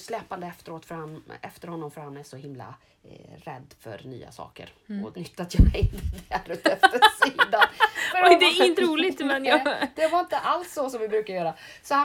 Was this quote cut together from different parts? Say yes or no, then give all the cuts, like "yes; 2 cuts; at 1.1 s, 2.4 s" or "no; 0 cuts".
yes; 3 cuts; at 2.9 s, 5.1 s, 8.8 s